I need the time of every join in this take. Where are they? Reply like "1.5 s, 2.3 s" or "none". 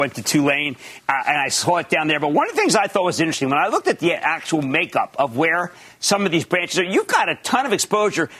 none